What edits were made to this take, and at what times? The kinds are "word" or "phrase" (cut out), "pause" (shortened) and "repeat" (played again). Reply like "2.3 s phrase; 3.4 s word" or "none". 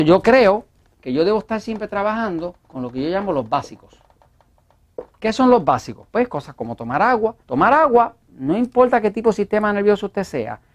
2.6 s pause; 7.4 s pause